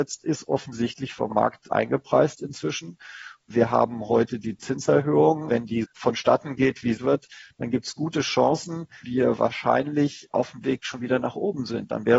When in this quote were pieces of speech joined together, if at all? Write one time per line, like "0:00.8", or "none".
0:05.8
0:07.0
0:09.0